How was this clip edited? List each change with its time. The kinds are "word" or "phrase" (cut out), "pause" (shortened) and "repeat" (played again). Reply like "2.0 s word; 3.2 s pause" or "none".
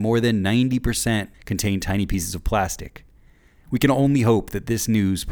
1.3 s pause